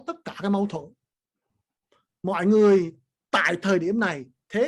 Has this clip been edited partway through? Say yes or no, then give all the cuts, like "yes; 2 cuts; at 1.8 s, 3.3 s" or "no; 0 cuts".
no; 0 cuts